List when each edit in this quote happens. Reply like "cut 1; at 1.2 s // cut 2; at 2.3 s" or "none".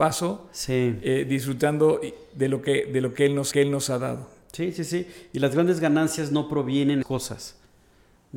cut 1; at 3.5 s // cut 2; at 7.0 s